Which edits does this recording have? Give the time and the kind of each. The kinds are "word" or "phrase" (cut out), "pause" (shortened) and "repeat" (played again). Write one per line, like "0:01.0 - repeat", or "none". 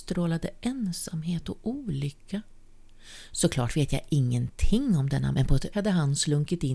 0:05.3 - word
0:05.7 - word